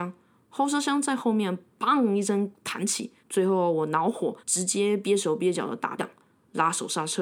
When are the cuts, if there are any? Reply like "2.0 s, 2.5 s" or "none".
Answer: 3.2 s, 4.4 s, 6.0 s